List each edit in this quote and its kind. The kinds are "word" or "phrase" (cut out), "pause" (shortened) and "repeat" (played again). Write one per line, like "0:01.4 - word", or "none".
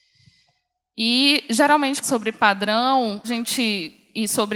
0:02.0 - phrase
0:03.2 - word